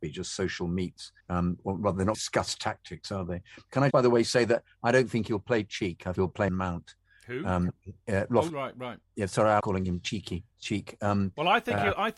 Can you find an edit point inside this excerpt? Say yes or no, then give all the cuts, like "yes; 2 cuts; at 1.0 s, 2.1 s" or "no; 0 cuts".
yes; 9 cuts; at 1.2 s, 2.1 s, 3.9 s, 6.2 s, 6.5 s, 8.5 s, 9.0 s, 9.6 s, 10.5 s